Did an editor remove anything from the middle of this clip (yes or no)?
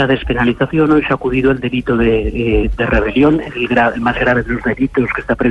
no